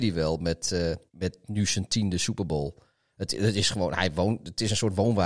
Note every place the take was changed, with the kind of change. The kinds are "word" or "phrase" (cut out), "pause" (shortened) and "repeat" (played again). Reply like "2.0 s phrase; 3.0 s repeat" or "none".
1.1 s pause